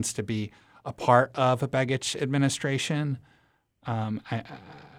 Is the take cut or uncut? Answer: uncut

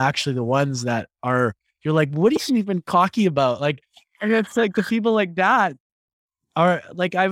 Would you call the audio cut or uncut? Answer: uncut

